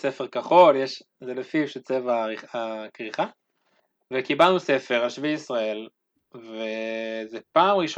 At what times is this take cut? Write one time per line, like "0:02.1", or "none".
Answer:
none